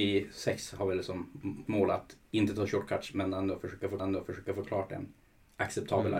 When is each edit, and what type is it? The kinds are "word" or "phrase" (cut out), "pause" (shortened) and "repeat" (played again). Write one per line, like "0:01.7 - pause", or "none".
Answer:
0:01.7 - word
0:04.0 - repeat